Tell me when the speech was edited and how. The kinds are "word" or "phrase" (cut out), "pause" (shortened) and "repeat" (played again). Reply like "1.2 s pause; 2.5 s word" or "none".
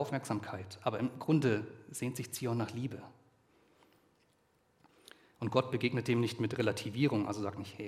none